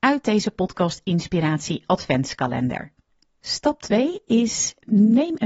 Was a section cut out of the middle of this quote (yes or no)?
no